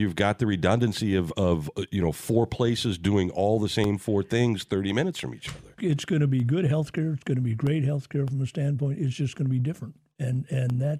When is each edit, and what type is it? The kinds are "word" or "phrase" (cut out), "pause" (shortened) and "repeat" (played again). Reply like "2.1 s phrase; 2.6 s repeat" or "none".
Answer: 5.8 s word